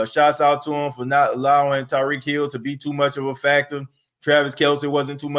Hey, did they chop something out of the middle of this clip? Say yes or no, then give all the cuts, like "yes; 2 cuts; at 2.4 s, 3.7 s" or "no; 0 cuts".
no; 0 cuts